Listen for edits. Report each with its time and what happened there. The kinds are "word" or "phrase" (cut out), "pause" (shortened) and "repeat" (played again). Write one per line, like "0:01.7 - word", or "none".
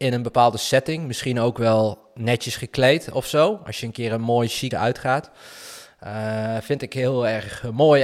0:04.7 - word